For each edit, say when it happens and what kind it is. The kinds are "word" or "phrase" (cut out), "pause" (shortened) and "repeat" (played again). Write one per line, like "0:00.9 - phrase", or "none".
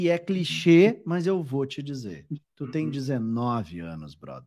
0:02.4 - pause